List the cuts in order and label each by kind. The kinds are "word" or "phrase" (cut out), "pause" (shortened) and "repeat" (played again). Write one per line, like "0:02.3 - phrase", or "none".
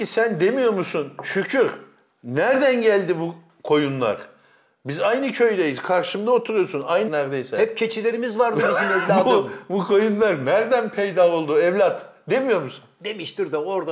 0:07.1 - word